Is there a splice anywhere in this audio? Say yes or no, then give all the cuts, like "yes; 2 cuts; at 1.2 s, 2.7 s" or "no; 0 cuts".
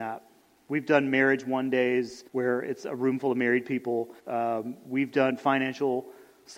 yes; 2 cuts; at 2.3 s, 4.2 s